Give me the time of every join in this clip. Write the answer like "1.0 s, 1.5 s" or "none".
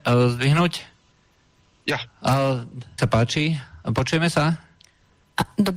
3.0 s